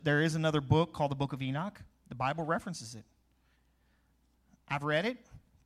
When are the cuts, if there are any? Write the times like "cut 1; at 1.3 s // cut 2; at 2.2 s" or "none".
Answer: none